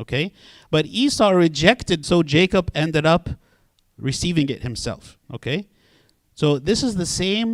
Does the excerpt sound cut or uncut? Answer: cut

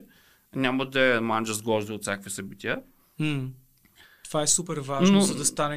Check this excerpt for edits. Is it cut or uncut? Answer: uncut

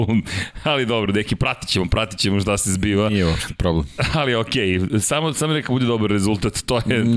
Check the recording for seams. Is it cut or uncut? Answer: uncut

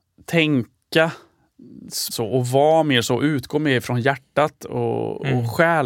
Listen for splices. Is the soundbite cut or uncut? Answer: cut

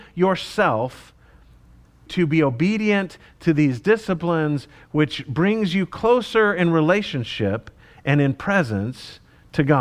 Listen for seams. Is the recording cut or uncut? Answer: cut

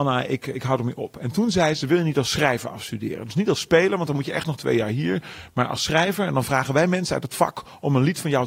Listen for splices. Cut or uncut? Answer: uncut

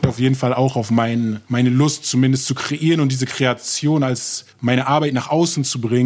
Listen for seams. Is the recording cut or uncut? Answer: cut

